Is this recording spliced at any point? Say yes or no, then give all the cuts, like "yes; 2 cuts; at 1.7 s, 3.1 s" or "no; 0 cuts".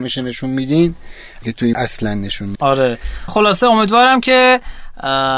yes; 4 cuts; at 1.4 s, 1.7 s, 2.5 s, 3.3 s